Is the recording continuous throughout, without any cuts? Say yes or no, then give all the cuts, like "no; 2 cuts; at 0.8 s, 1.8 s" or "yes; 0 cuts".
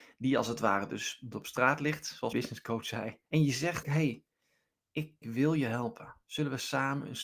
no; 5 cuts; at 1.3 s, 2.3 s, 3.3 s, 3.8 s, 5.2 s